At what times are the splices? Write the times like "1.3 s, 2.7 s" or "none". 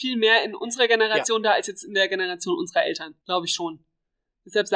3.2 s